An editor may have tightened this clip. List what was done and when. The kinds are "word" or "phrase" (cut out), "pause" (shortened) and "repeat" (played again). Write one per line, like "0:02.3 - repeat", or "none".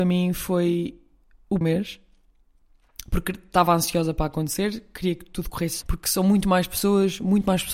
0:01.6 - phrase
0:05.8 - word